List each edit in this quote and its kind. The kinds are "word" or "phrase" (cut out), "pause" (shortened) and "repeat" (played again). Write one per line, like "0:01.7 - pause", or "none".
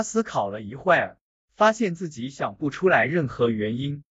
none